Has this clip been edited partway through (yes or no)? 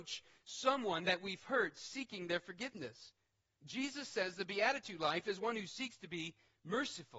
no